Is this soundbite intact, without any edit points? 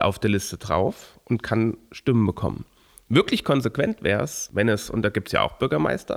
yes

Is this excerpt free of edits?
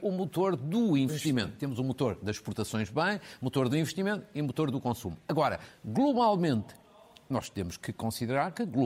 yes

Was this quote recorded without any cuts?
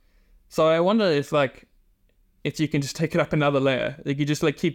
yes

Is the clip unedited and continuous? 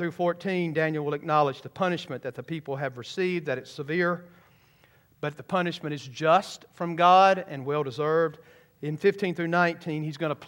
yes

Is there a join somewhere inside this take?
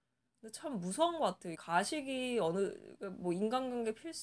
yes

